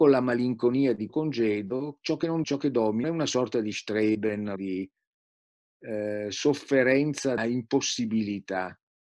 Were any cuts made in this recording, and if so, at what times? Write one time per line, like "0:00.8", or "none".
0:01.1
0:02.4
0:03.0
0:04.6
0:07.4